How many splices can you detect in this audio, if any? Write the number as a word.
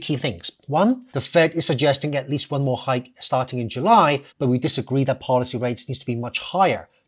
two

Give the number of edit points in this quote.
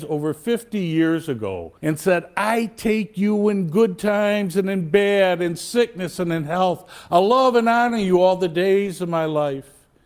one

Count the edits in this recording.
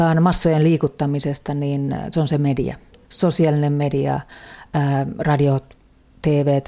one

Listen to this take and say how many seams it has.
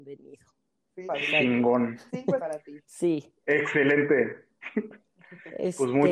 four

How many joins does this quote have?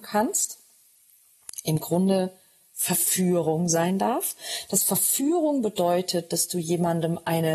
zero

